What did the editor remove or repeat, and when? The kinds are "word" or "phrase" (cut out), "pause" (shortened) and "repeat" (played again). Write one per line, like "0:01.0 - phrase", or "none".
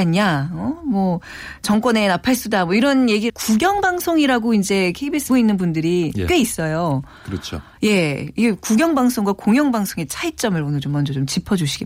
0:03.3 - word
0:05.3 - word

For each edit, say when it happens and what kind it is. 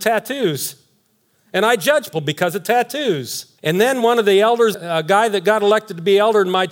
0:02.1 - word
0:03.6 - pause
0:04.7 - word

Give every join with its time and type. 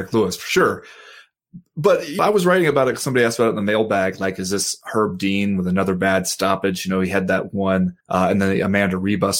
0:02.2 - word
0:08.0 - pause

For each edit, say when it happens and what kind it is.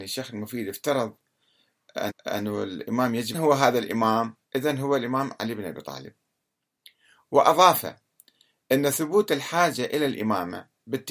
0:02.1 - repeat
0:03.3 - phrase
0:04.4 - pause

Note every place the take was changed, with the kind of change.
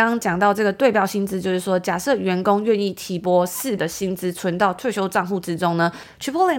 0:03.8 - word

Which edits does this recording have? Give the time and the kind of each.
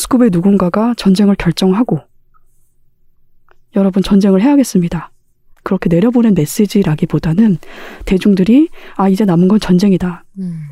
none

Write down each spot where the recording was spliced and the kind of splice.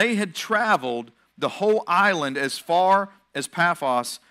none

